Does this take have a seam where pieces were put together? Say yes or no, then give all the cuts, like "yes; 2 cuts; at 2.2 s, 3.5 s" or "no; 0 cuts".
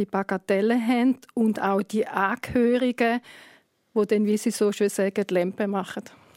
no; 0 cuts